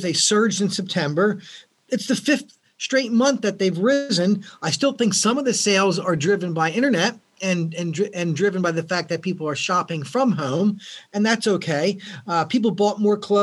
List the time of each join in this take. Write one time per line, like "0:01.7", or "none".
none